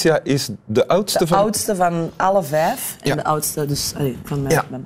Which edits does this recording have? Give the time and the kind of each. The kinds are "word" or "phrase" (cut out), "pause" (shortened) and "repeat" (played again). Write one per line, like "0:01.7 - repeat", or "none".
none